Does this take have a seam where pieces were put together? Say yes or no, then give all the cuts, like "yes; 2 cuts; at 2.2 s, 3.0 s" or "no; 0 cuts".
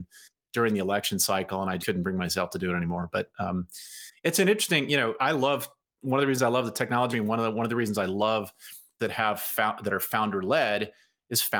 yes; 4 cuts; at 1.8 s, 5.2 s, 7.1 s, 9.0 s